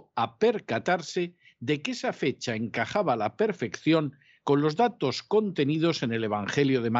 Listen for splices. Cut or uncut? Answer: uncut